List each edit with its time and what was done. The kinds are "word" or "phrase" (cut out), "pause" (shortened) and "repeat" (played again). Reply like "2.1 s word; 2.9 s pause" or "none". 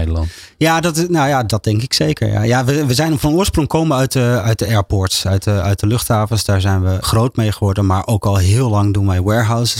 4.4 s word; 7.0 s word